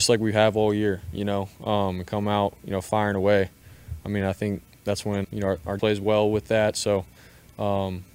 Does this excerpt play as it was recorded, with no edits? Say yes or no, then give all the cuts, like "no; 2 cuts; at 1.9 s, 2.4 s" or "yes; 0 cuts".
no; 2 cuts; at 5.2 s, 5.8 s